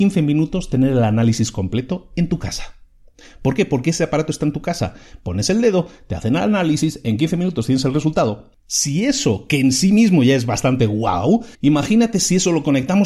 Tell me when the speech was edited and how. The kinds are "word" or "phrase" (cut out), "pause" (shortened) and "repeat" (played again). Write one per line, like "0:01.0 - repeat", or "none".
0:11.5 - pause

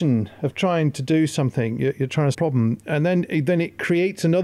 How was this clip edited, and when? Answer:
0:02.3 - phrase

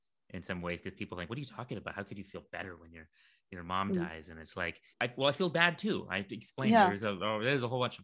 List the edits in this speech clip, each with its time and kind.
0:04.9 - pause

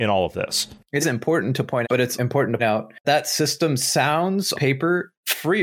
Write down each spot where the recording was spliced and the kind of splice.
0:01.0 - word
0:01.8 - word
0:02.2 - word
0:02.6 - word
0:03.0 - word
0:04.5 - word

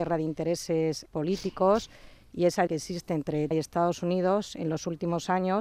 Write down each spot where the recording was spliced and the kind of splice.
0:01.1 - word
0:02.7 - word
0:03.5 - word

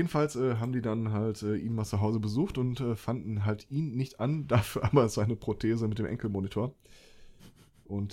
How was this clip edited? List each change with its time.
none

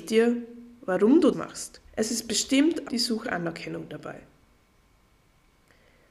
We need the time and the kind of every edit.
0:01.3 - word
0:01.9 - pause
0:02.8 - word
0:03.2 - word

